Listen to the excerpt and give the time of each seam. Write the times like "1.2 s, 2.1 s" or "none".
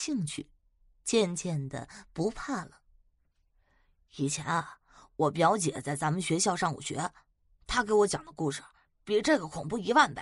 none